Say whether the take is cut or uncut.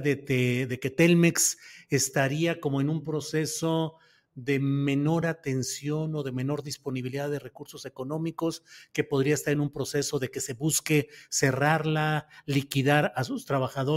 uncut